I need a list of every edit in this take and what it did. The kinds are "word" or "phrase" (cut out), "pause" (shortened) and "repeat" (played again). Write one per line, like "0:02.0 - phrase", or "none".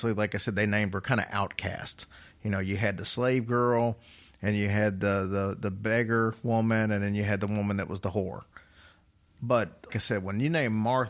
0:09.9 - word